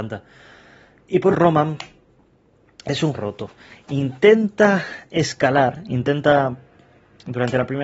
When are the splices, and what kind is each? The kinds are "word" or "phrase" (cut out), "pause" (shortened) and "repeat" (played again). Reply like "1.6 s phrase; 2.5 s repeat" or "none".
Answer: 1.3 s word; 3.1 s word